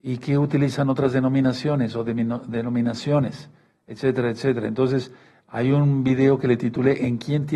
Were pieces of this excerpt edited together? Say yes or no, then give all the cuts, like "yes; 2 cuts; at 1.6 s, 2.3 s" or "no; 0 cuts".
no; 0 cuts